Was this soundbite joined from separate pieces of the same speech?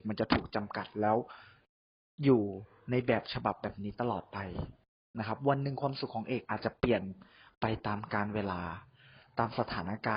no; 0 cuts

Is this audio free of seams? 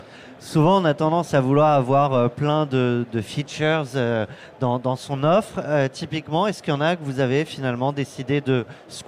yes; 0 cuts

